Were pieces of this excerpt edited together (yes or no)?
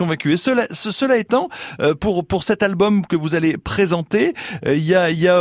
no